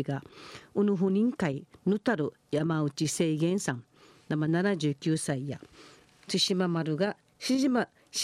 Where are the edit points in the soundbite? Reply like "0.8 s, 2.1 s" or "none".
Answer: none